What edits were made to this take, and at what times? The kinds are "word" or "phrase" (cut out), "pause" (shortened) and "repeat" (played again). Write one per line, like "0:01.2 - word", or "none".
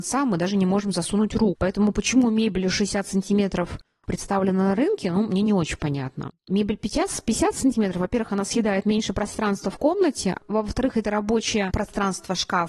none